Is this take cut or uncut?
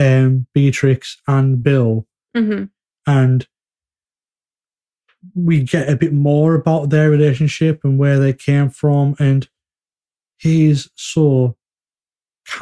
uncut